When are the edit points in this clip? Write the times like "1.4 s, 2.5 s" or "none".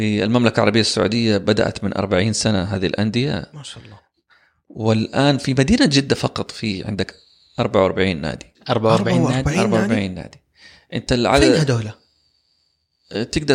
none

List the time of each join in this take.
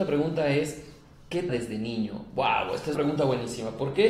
1.5 s, 2.9 s

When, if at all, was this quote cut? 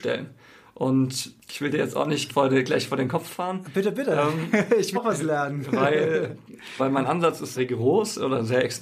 1.4 s, 2.3 s, 4.9 s, 6.8 s, 7.5 s

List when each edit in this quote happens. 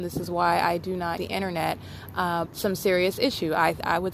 1.2 s, 2.5 s

